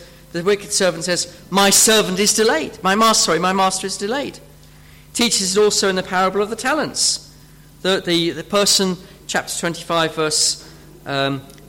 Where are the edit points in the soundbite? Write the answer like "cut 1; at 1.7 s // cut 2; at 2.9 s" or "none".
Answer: none